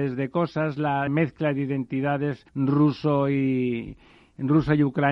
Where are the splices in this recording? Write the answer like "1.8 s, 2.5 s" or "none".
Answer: 1.1 s, 2.5 s